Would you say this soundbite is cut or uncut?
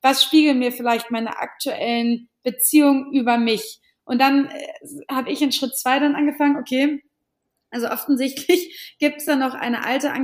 uncut